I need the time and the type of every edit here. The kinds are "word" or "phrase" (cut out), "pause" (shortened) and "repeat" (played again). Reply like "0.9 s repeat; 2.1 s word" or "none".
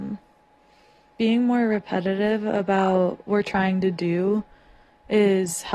1.2 s word; 3.3 s word